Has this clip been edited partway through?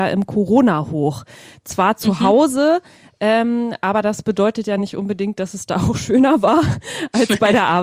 no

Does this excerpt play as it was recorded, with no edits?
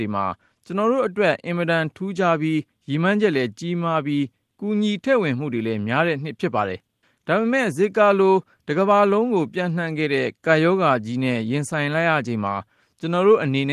yes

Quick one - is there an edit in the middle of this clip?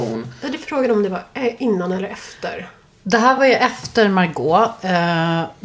no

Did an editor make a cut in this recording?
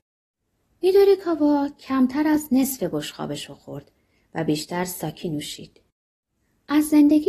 no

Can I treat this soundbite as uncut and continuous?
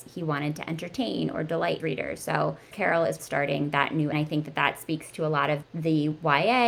no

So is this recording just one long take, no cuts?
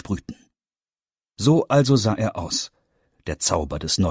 yes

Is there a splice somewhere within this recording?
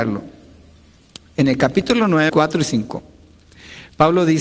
yes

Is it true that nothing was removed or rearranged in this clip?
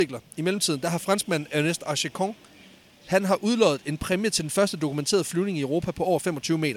yes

